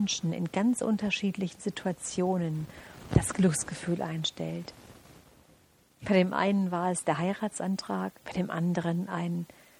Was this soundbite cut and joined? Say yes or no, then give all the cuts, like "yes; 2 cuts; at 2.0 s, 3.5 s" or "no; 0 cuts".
yes; 1 cut; at 8.2 s